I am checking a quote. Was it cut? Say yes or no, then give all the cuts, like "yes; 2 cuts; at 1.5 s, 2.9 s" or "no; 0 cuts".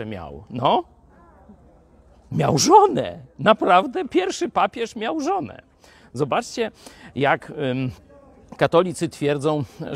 no; 0 cuts